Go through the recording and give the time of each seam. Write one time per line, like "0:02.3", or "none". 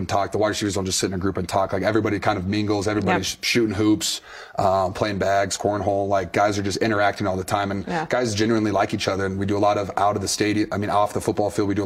none